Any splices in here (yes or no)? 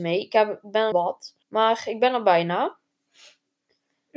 yes